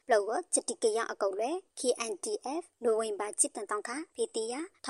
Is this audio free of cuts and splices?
yes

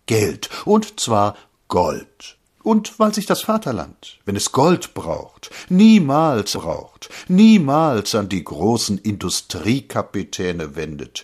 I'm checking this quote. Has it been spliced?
yes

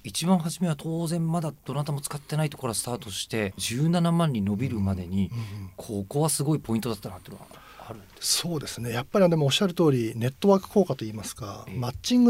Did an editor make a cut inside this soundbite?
no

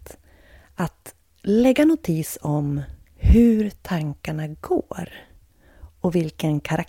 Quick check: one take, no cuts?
yes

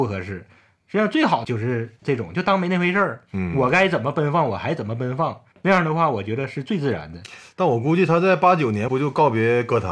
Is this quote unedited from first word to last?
no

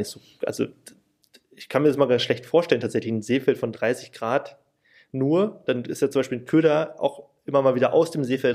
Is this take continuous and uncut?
yes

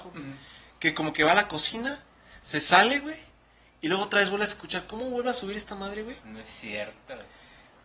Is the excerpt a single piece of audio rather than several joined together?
yes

